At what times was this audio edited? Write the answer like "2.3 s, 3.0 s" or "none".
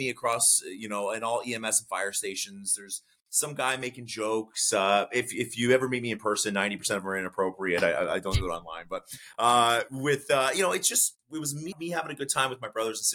11.7 s